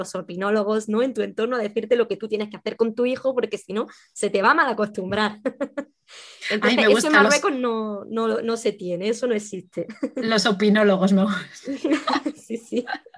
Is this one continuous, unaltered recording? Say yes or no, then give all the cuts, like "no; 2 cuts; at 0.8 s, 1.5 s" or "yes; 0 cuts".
yes; 0 cuts